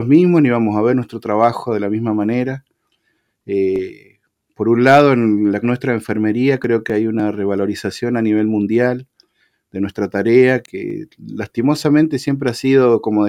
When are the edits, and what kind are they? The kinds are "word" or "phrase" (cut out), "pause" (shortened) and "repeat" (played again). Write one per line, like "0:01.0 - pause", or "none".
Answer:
0:05.6 - word
0:10.6 - word